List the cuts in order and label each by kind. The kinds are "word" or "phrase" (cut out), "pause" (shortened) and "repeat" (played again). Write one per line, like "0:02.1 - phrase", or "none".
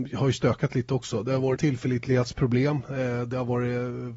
0:01.6 - word

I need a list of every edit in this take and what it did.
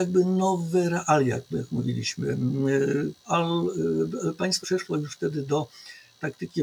0:03.2 - pause
0:04.6 - word

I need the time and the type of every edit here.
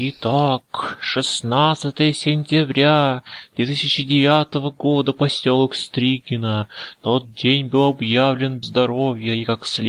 0:08.6 - word

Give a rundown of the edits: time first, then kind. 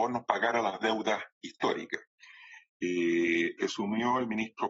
0:03.6 - word

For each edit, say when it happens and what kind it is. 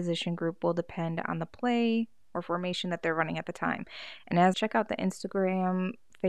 0:04.5 - word

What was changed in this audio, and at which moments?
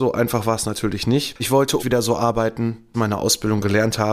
0:01.4 - word
0:01.8 - word
0:02.9 - phrase

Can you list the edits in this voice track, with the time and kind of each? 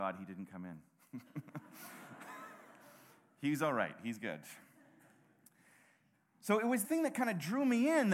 0:06.8 - word

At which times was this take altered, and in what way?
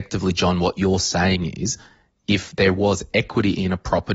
none

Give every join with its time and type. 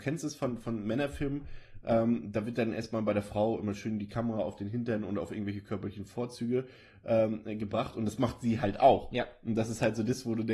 none

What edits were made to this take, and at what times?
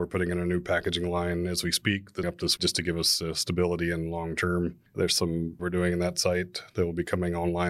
0:02.2 - word
0:02.6 - word
0:04.9 - pause
0:05.6 - word

